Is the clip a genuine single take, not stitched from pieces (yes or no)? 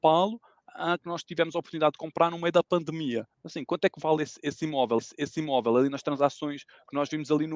no